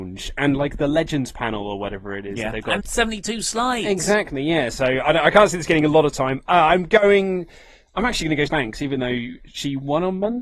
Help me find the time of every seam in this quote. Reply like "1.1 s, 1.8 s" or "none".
2.8 s, 8.5 s